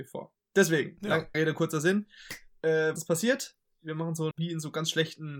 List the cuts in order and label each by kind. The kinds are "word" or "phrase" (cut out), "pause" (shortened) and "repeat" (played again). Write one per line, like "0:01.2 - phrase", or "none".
0:01.3 - word
0:03.0 - word
0:04.3 - word